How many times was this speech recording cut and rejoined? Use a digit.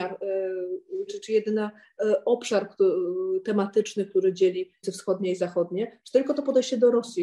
2